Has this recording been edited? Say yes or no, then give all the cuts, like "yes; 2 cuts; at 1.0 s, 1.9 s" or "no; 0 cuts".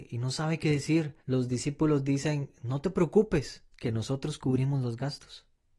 yes; 2 cuts; at 1.2 s, 3.7 s